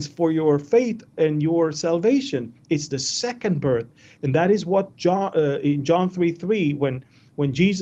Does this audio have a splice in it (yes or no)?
no